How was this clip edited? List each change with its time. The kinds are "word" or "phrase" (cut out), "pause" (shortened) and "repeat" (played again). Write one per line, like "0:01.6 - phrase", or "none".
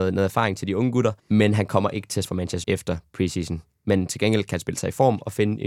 0:01.2 - pause
0:02.2 - word
0:02.6 - word